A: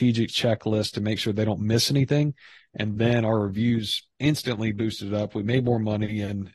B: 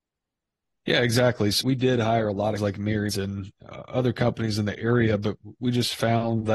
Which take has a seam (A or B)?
B